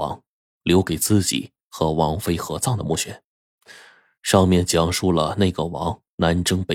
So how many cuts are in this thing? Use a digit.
0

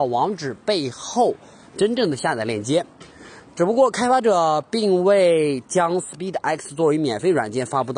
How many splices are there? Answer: 0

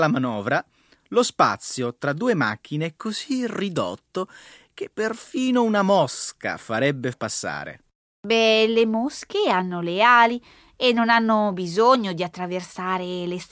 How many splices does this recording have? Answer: 1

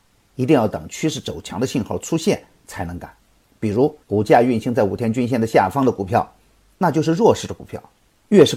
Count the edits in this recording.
1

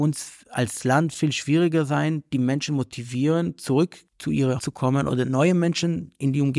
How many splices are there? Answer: 2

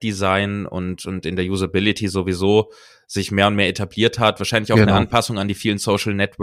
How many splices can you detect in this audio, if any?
0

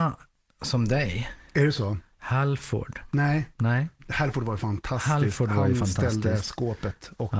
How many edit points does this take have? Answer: 1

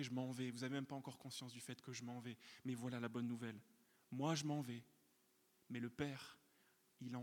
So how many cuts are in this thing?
0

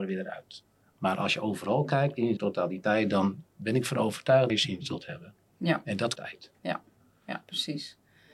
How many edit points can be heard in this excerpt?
5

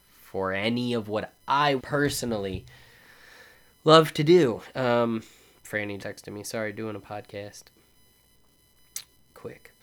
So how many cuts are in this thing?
3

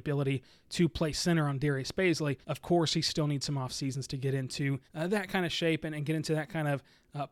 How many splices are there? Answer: 2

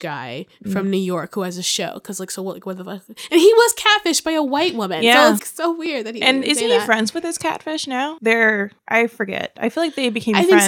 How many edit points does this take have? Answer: 3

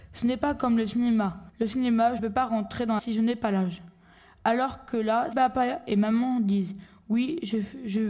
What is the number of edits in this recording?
4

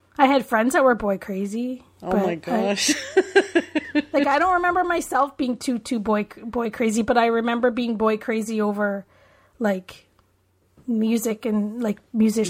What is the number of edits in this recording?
0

